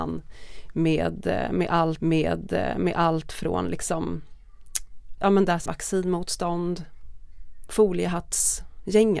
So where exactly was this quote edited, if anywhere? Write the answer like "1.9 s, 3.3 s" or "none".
2.0 s, 5.2 s, 5.7 s